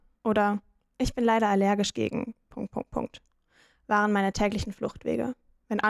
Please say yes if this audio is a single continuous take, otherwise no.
yes